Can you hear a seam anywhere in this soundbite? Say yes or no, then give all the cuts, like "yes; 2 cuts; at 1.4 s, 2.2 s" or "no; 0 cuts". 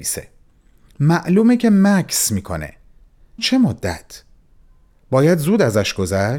yes; 1 cut; at 3.4 s